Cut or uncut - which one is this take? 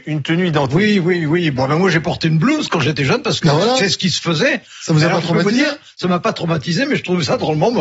uncut